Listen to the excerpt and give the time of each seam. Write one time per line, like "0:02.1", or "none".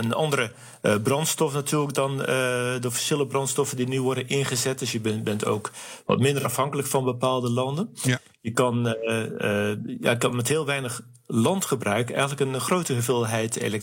none